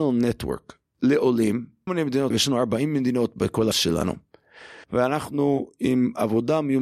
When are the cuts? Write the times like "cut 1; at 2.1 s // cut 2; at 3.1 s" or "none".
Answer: cut 1; at 1.9 s // cut 2; at 2.3 s // cut 3; at 3.7 s // cut 4; at 4.8 s